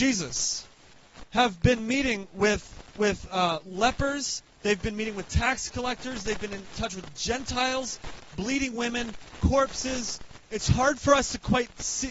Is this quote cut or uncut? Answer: uncut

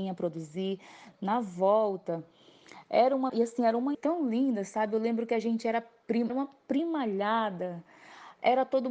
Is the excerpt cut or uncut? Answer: cut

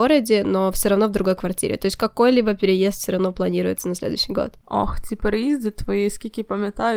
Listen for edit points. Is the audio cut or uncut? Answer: cut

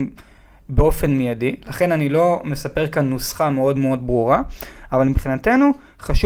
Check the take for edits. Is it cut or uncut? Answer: uncut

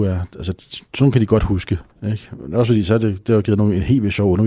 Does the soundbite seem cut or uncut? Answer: cut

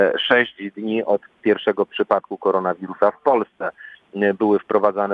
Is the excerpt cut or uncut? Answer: cut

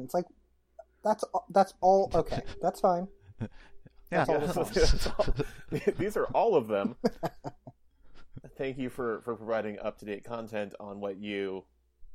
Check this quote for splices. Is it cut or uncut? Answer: uncut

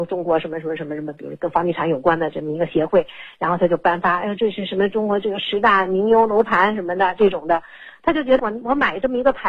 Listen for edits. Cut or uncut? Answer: cut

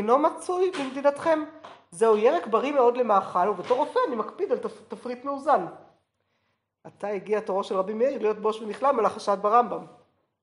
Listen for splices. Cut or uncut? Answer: uncut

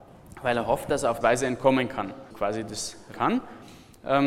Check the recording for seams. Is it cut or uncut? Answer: cut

